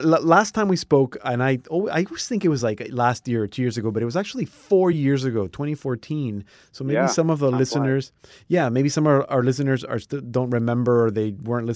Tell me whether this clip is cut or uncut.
uncut